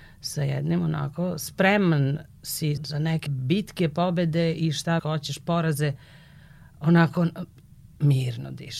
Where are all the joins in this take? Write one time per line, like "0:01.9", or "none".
0:02.8
0:03.3
0:05.0